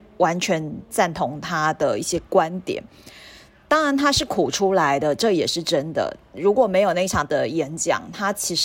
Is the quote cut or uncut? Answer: cut